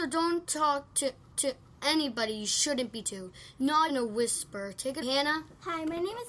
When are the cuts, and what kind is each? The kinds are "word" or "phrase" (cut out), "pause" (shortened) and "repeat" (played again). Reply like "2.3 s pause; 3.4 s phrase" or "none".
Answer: 1.3 s repeat; 3.0 s word; 3.9 s word; 5.0 s word